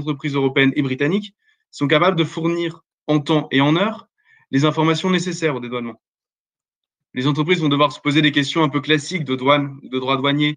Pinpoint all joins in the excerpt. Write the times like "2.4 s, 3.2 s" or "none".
none